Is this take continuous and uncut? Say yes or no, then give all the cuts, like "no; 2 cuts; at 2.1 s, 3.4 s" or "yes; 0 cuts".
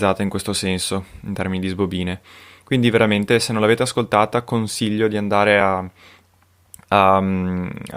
yes; 0 cuts